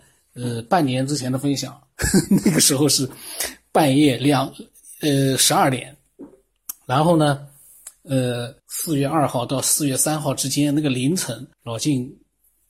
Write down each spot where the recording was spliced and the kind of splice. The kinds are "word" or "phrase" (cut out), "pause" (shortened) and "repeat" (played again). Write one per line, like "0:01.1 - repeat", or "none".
0:01.9 - phrase
0:08.6 - pause
0:11.5 - pause

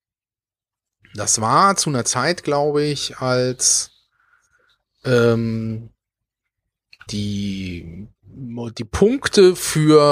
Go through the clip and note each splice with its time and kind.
0:07.1 - word

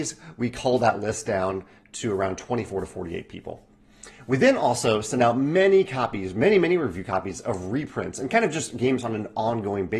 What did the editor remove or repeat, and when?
none

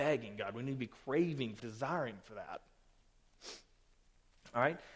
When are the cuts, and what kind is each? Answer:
0:01.6 - word

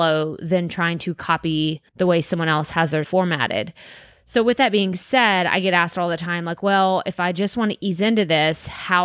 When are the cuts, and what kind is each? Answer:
0:01.9 - pause
0:03.0 - word

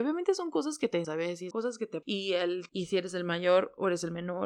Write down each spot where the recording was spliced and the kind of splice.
0:01.0 - word
0:01.5 - word
0:02.0 - word
0:02.7 - word

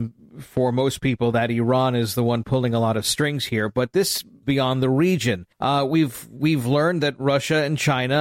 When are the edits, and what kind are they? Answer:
0:04.4 - phrase
0:05.5 - pause

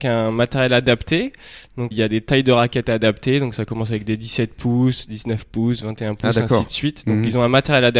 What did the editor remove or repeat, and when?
0:01.9 - word

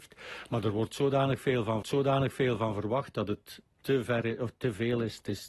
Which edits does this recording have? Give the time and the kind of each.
0:01.8 - repeat

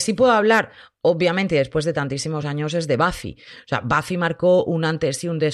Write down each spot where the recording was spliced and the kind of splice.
none

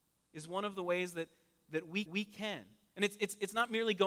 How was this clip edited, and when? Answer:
0:02.1 - repeat

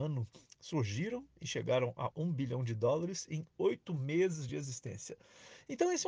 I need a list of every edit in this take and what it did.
none

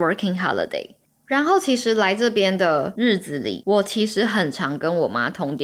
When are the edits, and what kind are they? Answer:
none

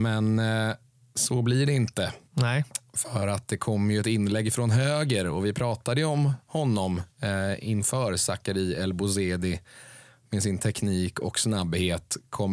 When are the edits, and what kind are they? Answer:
0:02.3 - pause
0:07.1 - pause

